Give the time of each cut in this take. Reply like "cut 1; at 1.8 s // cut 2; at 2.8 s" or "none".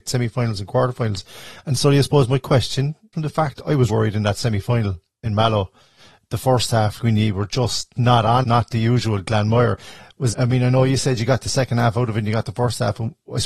cut 1; at 3.1 s // cut 2; at 3.9 s // cut 3; at 7.0 s // cut 4; at 8.0 s // cut 5; at 8.4 s // cut 6; at 10.3 s